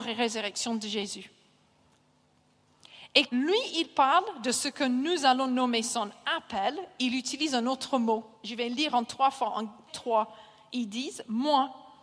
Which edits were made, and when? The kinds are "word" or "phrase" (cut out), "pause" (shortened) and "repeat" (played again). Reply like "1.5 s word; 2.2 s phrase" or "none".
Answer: 3.3 s word; 8.3 s pause; 9.9 s word